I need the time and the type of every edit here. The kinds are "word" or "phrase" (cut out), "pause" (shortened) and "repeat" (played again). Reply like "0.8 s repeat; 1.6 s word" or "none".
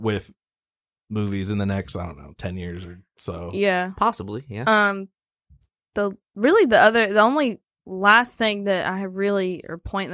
6.2 s pause

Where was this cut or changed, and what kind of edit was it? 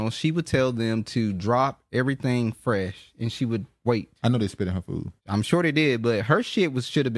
5.2 s pause

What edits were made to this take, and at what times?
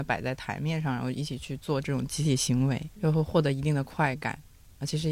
2.9 s word

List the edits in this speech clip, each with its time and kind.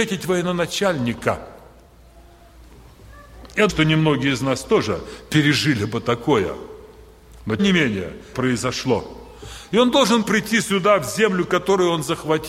3.7 s word; 7.6 s word; 8.3 s word; 10.2 s word

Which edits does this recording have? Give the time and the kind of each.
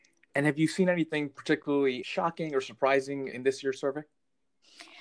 2.0 s word; 3.3 s word

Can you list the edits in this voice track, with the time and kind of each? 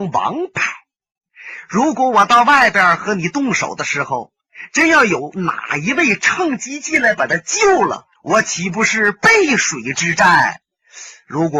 8.2 s pause

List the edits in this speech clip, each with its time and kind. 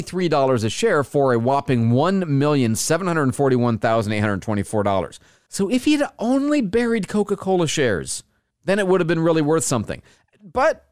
none

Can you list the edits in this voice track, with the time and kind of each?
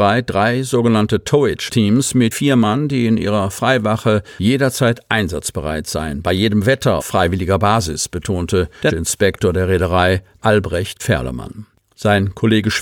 1.7 s word; 2.3 s word; 7.0 s word; 8.9 s word; 10.4 s word; 11.0 s word

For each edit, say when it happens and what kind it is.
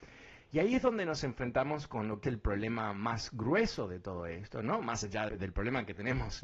2.2 s word; 5.3 s word

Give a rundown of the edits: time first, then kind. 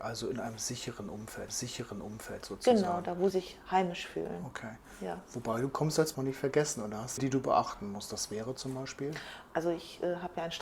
1.5 s repeat; 3.3 s word; 6.1 s phrase; 7.2 s phrase

